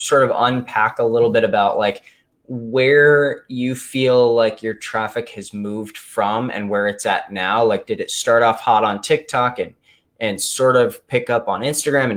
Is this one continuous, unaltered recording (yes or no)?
yes